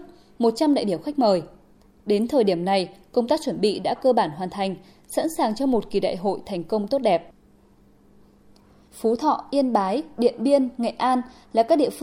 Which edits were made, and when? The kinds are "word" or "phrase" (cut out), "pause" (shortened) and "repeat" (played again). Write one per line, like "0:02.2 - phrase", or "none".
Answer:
none